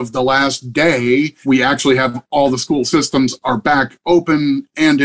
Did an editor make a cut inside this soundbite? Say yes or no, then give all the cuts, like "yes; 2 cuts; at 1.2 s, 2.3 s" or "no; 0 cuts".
yes; 1 cut; at 1.4 s